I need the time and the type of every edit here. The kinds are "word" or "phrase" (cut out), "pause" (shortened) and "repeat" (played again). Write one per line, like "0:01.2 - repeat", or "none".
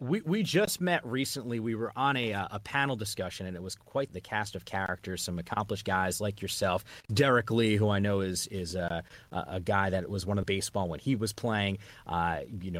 0:04.1 - word
0:10.4 - phrase